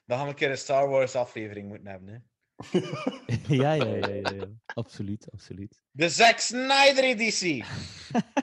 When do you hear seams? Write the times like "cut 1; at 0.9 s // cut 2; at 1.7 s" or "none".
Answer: cut 1; at 4.6 s